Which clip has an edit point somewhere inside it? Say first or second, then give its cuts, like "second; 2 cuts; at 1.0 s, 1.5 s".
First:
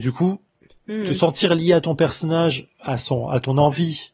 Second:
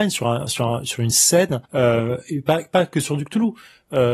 second; 1 cut; at 1.6 s